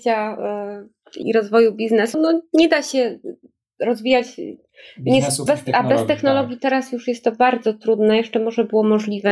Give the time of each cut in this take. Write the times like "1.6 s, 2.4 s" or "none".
1.2 s, 2.1 s, 5.5 s